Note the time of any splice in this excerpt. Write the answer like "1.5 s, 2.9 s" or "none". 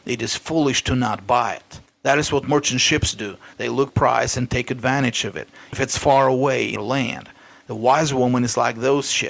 1.9 s, 3.9 s, 5.7 s, 6.8 s

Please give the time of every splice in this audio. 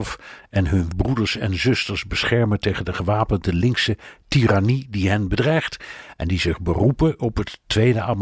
0.9 s

